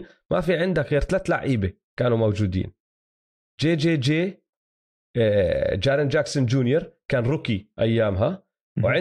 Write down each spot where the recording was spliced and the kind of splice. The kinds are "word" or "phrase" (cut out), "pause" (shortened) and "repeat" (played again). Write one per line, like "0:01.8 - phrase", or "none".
none